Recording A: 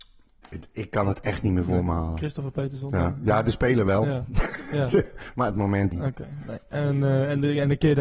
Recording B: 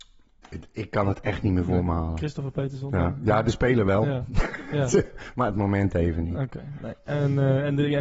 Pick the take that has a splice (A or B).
A